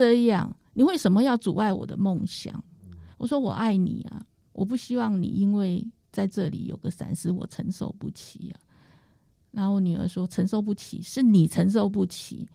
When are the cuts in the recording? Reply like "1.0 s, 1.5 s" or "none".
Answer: none